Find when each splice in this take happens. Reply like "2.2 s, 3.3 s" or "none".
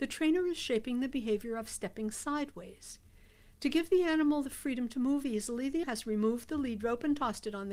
5.8 s